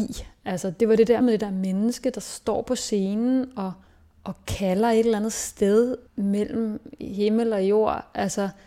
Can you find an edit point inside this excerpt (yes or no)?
yes